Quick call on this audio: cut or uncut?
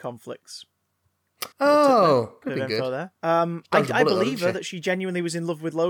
cut